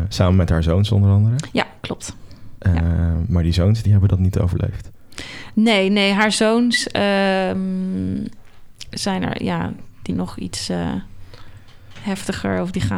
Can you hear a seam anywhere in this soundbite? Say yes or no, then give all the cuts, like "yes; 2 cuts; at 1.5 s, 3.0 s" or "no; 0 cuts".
yes; 2 cuts; at 3.8 s, 10.1 s